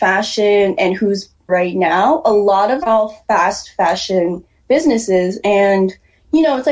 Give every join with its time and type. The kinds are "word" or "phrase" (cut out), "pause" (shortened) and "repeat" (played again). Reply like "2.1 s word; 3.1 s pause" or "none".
1.5 s word; 2.8 s word

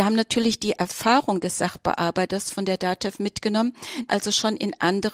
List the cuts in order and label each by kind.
4.1 s word

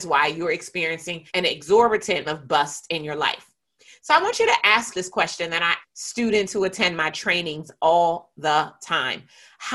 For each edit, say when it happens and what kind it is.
1.3 s pause; 2.2 s word; 4.9 s word; 5.8 s word

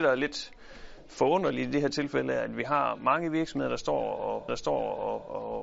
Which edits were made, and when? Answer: 4.5 s repeat

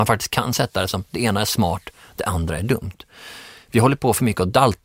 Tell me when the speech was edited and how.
none

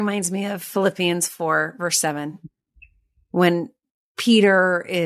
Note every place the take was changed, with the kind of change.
none

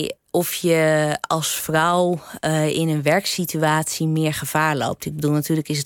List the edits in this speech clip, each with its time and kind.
none

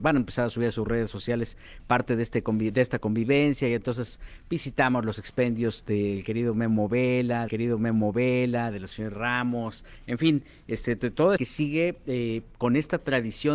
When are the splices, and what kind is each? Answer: 7.5 s repeat; 11.4 s phrase

